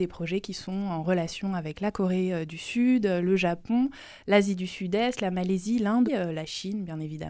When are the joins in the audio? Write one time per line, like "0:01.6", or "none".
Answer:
0:06.1